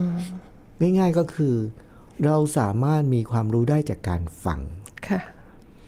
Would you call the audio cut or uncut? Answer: uncut